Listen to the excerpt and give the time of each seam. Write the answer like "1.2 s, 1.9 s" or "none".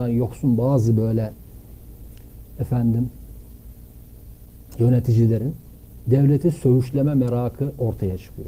none

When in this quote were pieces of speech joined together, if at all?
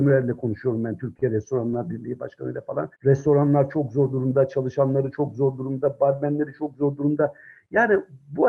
2.9 s

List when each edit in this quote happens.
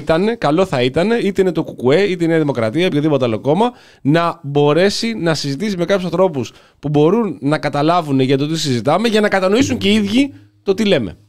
none

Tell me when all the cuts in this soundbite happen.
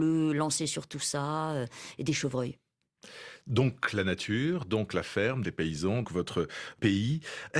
5.4 s, 6.0 s

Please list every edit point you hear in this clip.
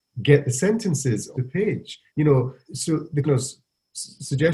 1.3 s, 2.1 s, 2.7 s, 3.2 s

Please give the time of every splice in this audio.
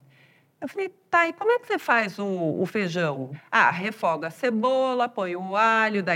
none

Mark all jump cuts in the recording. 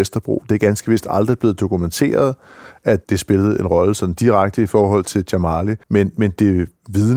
5.8 s

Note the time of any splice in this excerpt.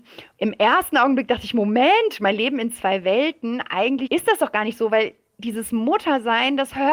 none

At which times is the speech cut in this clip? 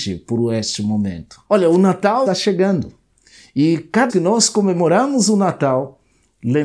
1.5 s, 2.3 s, 4.1 s

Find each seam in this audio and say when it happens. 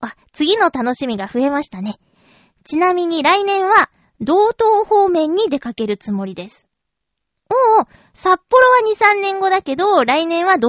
none

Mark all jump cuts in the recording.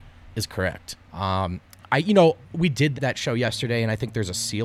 1.0 s, 2.4 s, 2.9 s

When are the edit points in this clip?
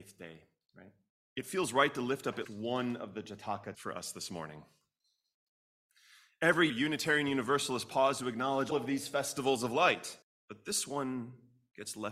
1.1 s, 2.4 s, 3.7 s, 6.7 s, 8.7 s, 10.2 s

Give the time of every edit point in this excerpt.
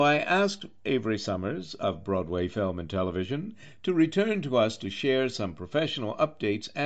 none

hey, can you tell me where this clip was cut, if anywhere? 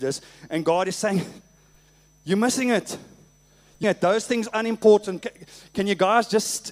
3.8 s, 4.5 s, 5.2 s

